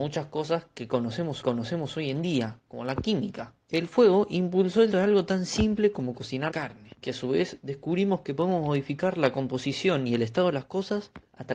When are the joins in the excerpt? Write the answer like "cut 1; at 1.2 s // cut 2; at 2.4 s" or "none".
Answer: cut 1; at 1.4 s // cut 2; at 3.6 s // cut 3; at 4.9 s // cut 4; at 6.5 s // cut 5; at 7.0 s